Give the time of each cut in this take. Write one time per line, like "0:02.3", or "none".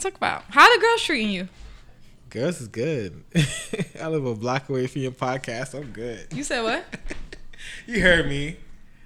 none